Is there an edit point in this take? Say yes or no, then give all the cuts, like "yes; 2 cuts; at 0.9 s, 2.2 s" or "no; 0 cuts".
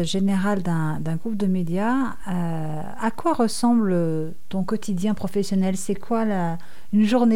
no; 0 cuts